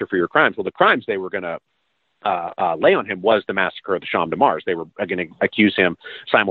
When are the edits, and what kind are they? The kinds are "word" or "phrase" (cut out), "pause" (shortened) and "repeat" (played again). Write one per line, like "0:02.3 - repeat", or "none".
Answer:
none